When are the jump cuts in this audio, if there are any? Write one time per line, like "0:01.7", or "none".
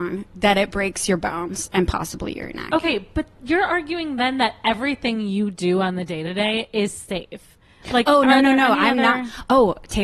none